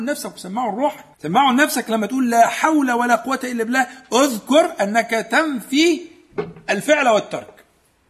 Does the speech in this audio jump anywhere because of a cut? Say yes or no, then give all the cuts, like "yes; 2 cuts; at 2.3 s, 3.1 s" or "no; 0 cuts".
yes; 1 cut; at 1.1 s